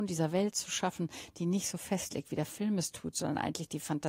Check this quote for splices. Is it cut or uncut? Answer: uncut